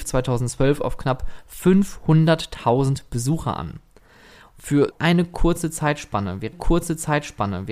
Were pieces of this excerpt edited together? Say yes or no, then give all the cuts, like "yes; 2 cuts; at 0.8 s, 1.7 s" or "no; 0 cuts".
yes; 2 cuts; at 4.9 s, 6.5 s